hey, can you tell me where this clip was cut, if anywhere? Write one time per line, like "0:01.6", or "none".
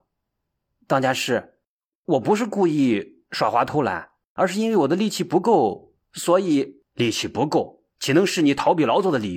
0:06.0
0:06.9
0:07.9